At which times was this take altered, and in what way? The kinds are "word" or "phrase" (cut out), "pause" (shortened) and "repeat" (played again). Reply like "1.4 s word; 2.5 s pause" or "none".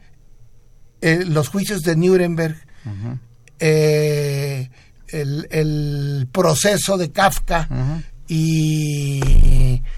none